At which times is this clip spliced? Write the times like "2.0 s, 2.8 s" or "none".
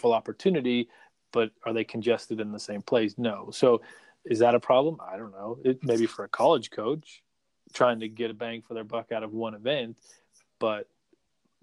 none